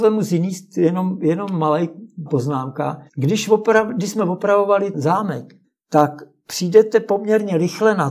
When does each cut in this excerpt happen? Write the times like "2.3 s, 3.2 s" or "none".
2.3 s, 3.1 s, 4.9 s, 5.6 s